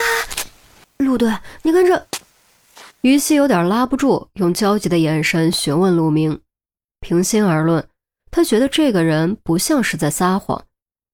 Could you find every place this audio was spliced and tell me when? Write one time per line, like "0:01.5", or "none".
none